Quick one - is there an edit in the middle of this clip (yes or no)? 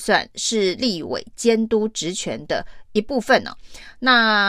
no